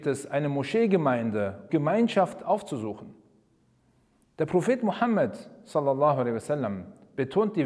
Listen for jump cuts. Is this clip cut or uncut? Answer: cut